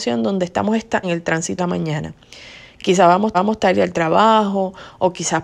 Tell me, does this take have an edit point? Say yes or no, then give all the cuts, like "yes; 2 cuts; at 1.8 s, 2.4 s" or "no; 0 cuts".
yes; 3 cuts; at 1.0 s, 1.6 s, 3.3 s